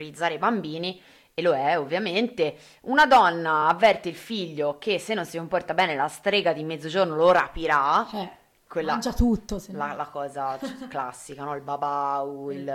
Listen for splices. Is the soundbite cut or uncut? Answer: uncut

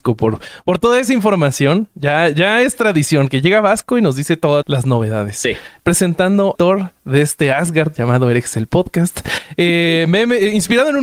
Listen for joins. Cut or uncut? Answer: cut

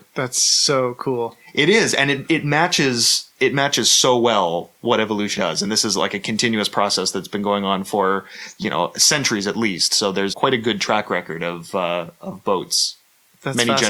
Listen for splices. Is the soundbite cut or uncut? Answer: cut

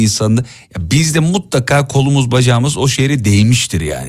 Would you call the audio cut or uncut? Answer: uncut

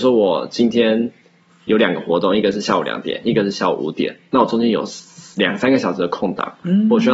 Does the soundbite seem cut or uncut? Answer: uncut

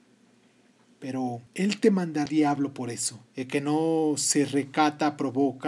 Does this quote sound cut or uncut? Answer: cut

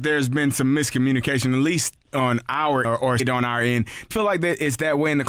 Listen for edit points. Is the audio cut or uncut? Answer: cut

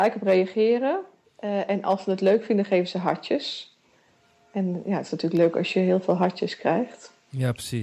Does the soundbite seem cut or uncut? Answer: uncut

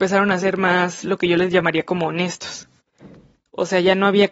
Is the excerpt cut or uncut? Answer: uncut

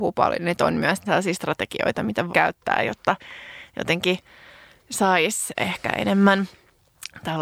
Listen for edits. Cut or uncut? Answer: cut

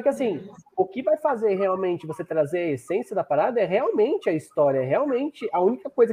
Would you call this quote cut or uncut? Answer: uncut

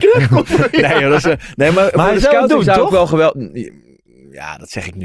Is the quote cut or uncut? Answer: uncut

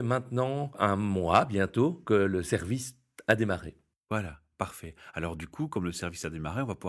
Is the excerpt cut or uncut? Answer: uncut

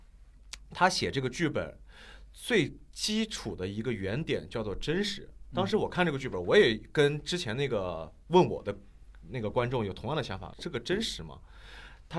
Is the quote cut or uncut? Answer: cut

